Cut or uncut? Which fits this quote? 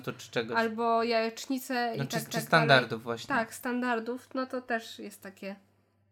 cut